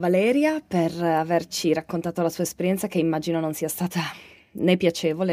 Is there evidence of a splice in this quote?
no; 0 cuts

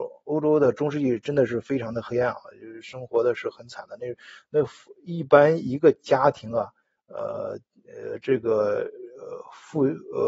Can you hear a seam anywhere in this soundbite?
no; 0 cuts

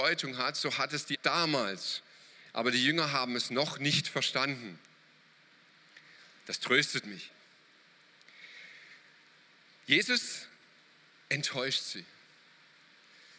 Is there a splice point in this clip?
yes; 1 cut; at 1.1 s

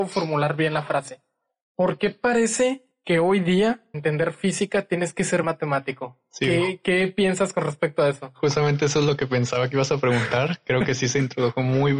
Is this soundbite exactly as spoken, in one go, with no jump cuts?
no; 2 cuts; at 3.9 s, 5.4 s

